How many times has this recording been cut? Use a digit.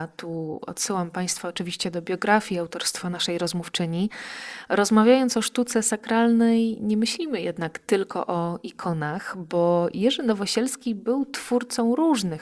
0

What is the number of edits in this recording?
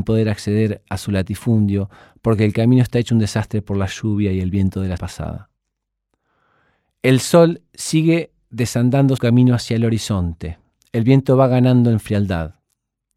2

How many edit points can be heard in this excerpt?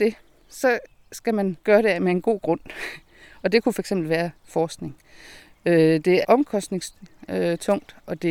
2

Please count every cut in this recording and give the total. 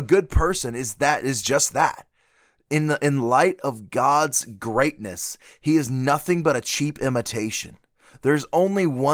0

